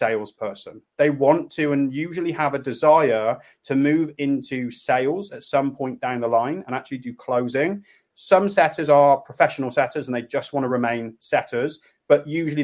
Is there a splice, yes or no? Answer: no